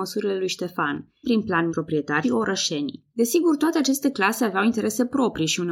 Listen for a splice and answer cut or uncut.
cut